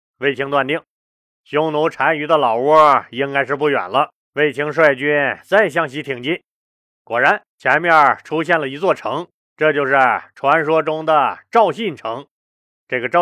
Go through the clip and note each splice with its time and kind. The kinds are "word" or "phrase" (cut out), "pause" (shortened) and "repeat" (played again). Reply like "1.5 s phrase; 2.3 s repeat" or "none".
4.2 s pause; 7.5 s pause; 9.4 s pause